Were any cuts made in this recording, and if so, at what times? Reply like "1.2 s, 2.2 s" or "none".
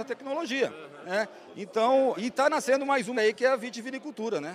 2.2 s, 3.1 s